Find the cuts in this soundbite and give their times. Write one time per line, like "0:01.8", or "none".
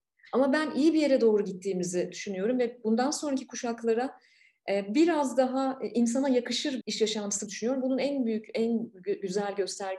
0:06.8
0:07.5